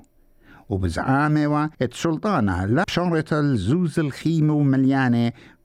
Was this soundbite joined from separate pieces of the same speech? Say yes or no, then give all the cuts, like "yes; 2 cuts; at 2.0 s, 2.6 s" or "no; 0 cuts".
yes; 2 cuts; at 1.7 s, 2.8 s